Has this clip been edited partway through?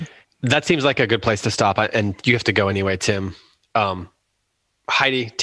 no; 0 cuts

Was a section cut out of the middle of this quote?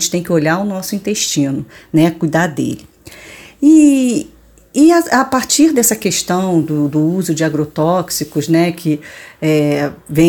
no; 0 cuts

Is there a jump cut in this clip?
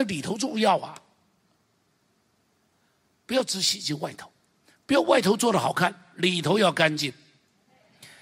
no; 0 cuts

